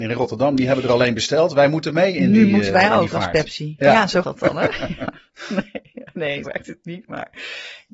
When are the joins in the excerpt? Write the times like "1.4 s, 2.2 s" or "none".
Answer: 4.2 s, 6.5 s